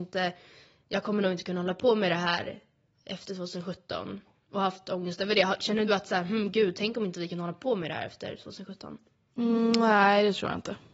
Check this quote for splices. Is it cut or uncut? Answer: cut